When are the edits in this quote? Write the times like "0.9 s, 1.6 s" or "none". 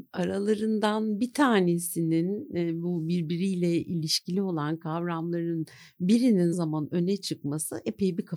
6.5 s